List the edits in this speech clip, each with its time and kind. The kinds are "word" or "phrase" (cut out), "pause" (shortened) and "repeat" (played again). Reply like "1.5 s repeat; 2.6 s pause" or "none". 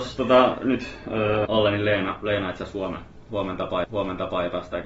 1.4 s word; 3.8 s repeat